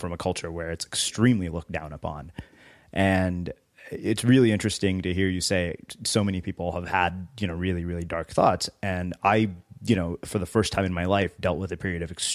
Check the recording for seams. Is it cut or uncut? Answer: uncut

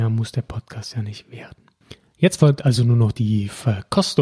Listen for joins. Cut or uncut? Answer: uncut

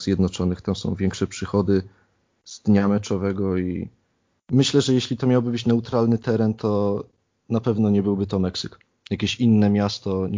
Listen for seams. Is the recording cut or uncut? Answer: uncut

